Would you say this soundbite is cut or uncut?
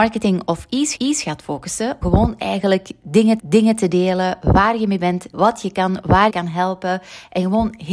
cut